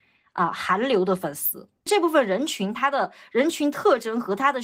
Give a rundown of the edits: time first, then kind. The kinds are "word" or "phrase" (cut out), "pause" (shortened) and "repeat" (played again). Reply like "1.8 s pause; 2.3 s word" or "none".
1.8 s pause

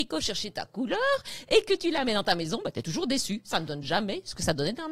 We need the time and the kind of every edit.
none

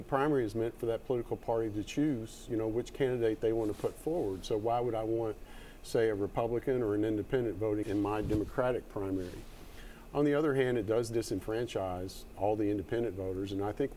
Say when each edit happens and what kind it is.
7.8 s word

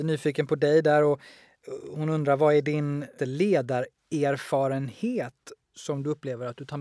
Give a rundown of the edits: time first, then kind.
3.2 s word

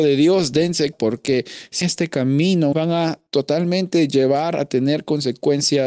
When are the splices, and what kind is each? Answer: 0.9 s word; 1.8 s phrase; 2.7 s word; 3.3 s pause

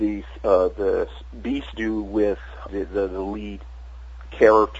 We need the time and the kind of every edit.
1.7 s phrase; 2.7 s word

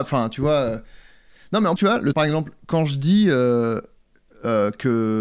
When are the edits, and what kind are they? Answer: 1.8 s word; 2.1 s word

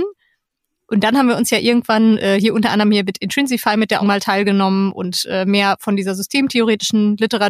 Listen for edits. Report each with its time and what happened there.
4.0 s word

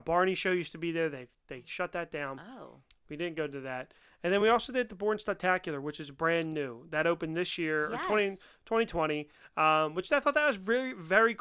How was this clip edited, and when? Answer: none

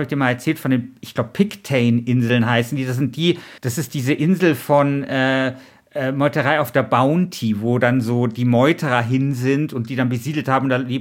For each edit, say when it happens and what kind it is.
3.6 s pause

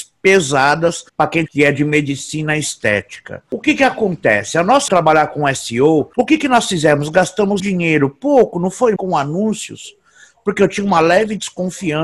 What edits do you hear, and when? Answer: 1.1 s pause; 1.5 s phrase; 4.9 s phrase; 7.6 s word; 9.0 s word

